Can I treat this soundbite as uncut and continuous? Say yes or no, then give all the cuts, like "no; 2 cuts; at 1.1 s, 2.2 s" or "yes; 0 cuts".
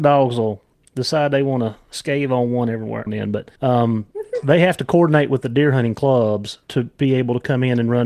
no; 3 cuts; at 3.1 s, 3.6 s, 6.6 s